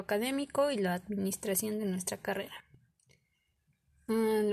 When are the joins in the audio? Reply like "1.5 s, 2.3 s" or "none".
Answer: none